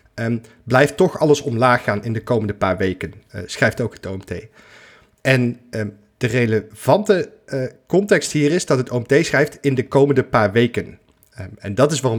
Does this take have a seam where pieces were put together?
no; 0 cuts

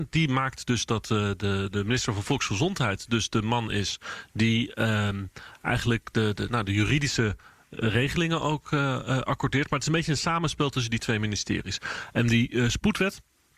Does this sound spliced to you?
yes; 1 cut; at 6.3 s

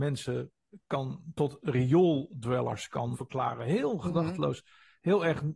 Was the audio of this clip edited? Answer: yes; 1 cut; at 3.1 s

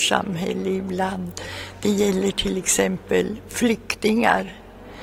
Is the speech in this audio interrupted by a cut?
no; 0 cuts

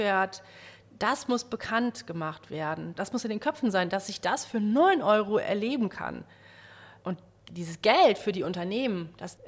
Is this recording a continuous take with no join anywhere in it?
yes; 0 cuts

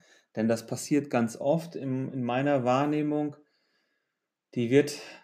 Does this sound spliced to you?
no; 0 cuts

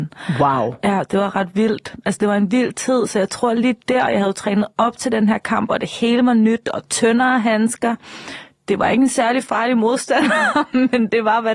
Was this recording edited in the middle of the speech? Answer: no; 0 cuts

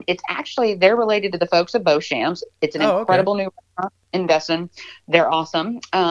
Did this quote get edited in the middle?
no; 0 cuts

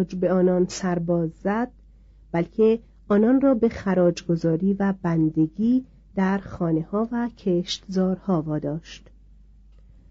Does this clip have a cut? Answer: no; 0 cuts

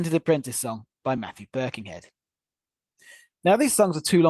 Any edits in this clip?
no; 0 cuts

